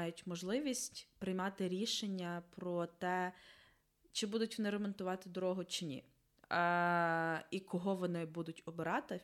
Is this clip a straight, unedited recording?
yes; 0 cuts

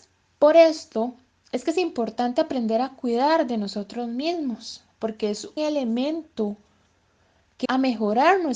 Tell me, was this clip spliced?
yes; 2 cuts; at 5.6 s, 7.6 s

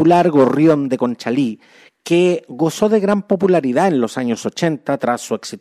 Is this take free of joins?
yes; 0 cuts

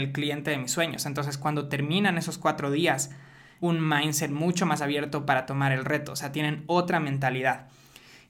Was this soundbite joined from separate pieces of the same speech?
yes; 1 cut; at 3.6 s

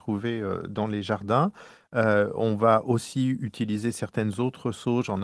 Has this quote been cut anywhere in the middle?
no; 0 cuts

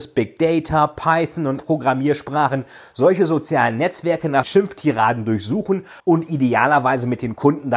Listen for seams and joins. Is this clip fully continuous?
no; 3 cuts; at 1.6 s, 4.4 s, 6.0 s

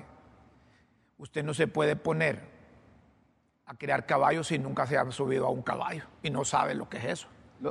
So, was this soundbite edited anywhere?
no; 0 cuts

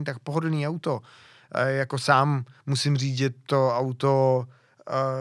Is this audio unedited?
yes; 0 cuts

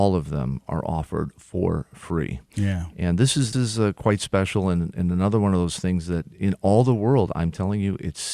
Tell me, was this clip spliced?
yes; 1 cut; at 3.5 s

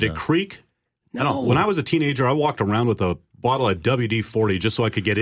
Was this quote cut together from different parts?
no; 0 cuts

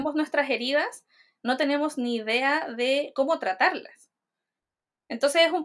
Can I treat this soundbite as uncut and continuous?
yes; 0 cuts

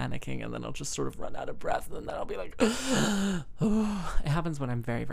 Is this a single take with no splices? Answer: yes; 0 cuts

